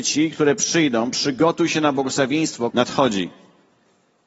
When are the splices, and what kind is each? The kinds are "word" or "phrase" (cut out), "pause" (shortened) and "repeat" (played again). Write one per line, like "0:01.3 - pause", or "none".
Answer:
0:02.7 - word